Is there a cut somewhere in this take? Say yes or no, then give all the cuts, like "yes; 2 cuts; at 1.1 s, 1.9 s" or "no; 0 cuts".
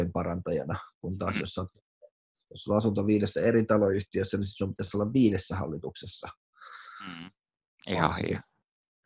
no; 0 cuts